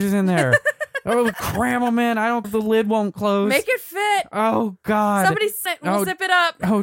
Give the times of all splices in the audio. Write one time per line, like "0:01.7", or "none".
0:01.3
0:02.4
0:05.7